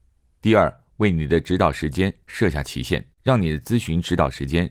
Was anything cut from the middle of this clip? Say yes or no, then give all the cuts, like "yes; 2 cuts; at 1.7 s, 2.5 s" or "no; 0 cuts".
yes; 1 cut; at 3.2 s